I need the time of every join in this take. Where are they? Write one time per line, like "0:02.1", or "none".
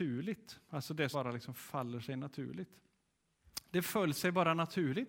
0:01.1